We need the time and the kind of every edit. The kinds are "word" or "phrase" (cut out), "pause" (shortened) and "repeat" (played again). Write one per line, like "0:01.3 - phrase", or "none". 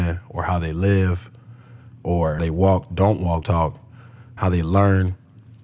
0:02.4 - word
0:02.9 - word
0:03.4 - word
0:04.4 - word